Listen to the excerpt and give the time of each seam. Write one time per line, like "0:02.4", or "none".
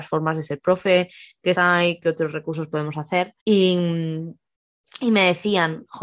0:01.5
0:03.4